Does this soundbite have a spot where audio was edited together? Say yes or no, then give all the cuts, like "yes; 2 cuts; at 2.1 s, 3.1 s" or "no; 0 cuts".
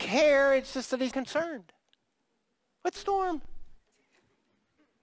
yes; 2 cuts; at 1.1 s, 3.0 s